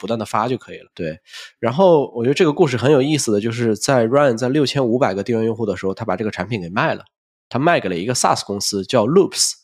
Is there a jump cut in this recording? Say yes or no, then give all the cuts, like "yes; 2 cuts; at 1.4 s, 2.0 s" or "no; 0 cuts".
no; 0 cuts